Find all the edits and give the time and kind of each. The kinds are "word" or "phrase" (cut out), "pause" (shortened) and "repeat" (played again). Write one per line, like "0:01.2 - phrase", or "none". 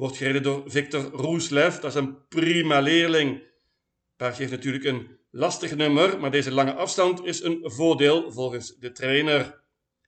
none